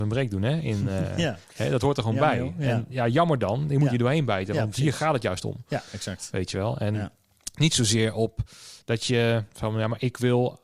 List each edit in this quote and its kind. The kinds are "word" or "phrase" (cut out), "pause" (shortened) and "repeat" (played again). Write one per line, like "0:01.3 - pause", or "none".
0:01.4 - pause